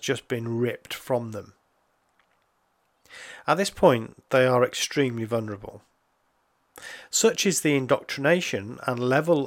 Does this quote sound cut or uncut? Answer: uncut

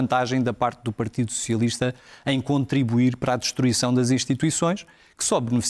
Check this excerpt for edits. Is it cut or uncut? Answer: uncut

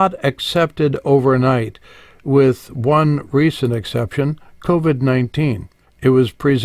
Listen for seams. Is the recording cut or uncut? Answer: uncut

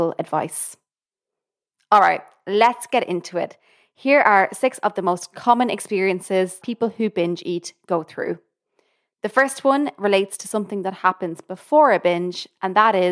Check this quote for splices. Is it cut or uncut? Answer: cut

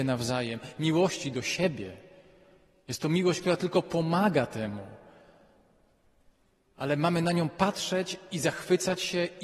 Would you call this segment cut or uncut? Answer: uncut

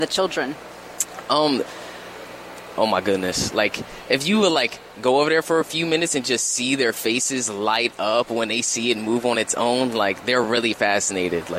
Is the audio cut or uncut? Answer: uncut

